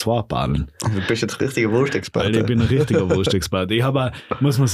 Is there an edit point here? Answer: no; 0 cuts

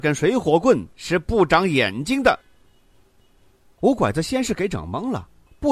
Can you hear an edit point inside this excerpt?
no; 0 cuts

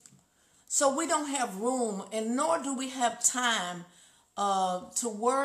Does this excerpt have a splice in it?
no; 0 cuts

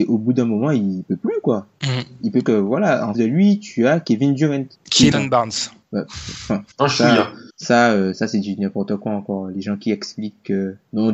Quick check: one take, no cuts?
no; 5 cuts; at 2.5 s, 3.1 s, 5.1 s, 6.7 s, 7.5 s

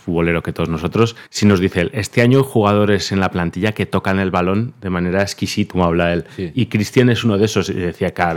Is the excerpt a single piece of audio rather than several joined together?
no; 2 cuts; at 1.3 s, 5.7 s

